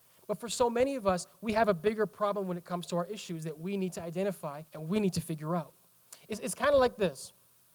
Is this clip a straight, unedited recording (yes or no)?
no